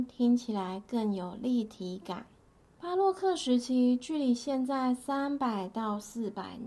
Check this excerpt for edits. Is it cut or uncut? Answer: cut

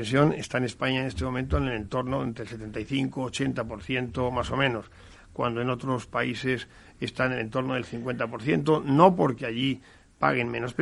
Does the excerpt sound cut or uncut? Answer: uncut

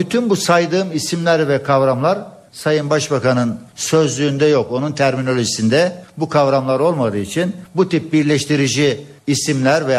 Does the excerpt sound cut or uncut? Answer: uncut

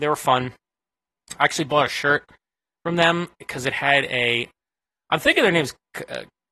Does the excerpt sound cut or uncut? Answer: uncut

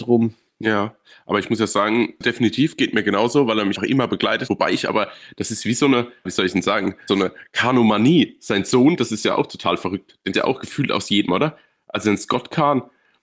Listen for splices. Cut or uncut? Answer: cut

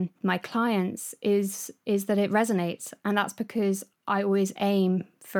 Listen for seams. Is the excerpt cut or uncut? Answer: cut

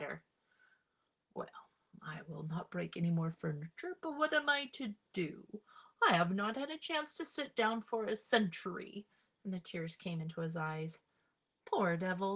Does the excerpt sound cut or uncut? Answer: uncut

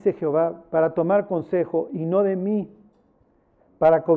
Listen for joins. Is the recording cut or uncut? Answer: uncut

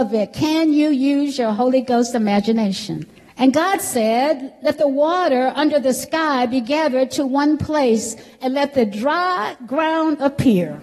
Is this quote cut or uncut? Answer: cut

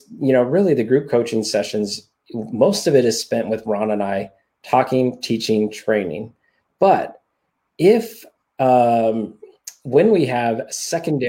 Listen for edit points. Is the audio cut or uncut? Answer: uncut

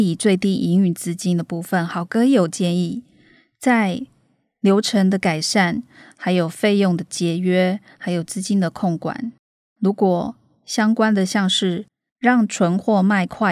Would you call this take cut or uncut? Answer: uncut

